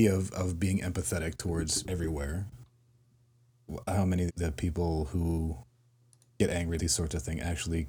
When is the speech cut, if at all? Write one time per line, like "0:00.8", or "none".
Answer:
0:01.8
0:03.9
0:04.3
0:06.8

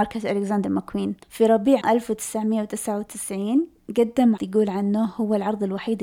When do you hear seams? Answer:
0:01.2
0:01.8
0:04.4

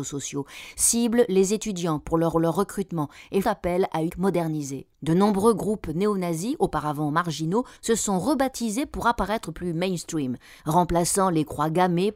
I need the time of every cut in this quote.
0:02.3
0:03.4
0:04.1
0:04.9
0:07.8
0:10.6

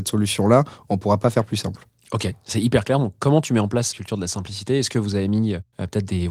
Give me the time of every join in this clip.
0:01.9
0:03.9

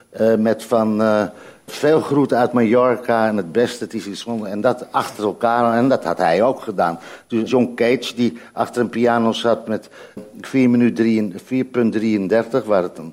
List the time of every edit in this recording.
0:01.7
0:07.5
0:10.2

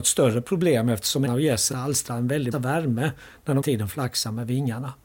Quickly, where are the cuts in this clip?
0:01.3
0:01.7
0:02.5
0:03.6

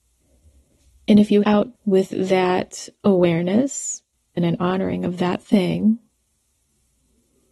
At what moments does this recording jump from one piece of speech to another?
0:01.4
0:01.7
0:04.4

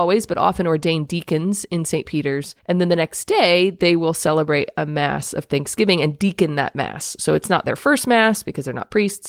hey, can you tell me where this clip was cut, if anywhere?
0:02.6

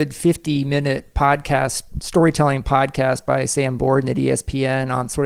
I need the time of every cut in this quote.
none

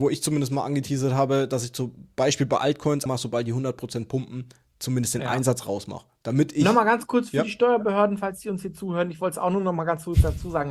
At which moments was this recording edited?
0:03.1

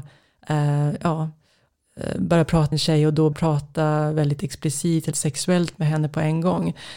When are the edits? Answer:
0:02.7
0:03.3
0:05.1

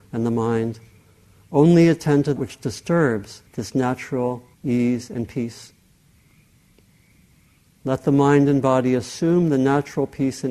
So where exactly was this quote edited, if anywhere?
0:02.4
0:03.5
0:04.5

